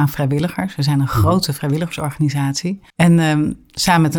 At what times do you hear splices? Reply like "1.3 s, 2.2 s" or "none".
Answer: 2.9 s

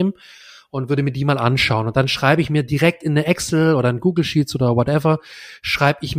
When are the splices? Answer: none

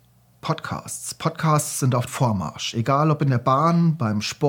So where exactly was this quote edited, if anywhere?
2.1 s

